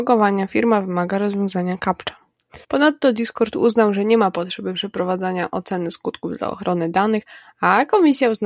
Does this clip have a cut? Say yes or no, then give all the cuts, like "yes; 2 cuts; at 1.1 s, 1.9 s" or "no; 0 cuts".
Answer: yes; 1 cut; at 2.6 s